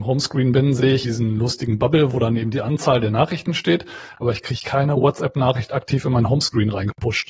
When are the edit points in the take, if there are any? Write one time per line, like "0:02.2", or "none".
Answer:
0:01.0